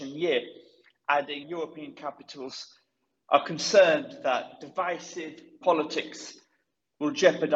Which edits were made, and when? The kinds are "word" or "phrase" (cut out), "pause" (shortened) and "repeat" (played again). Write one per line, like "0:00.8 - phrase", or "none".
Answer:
0:01.4 - word
0:05.6 - word